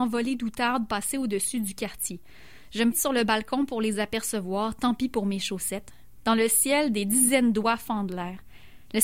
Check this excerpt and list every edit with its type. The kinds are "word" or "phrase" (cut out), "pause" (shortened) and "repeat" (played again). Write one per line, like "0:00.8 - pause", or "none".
0:02.9 - word